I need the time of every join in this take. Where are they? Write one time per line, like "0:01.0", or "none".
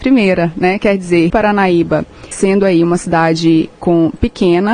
0:01.3
0:02.3